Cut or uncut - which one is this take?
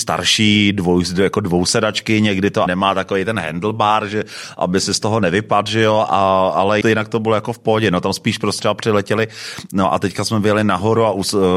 cut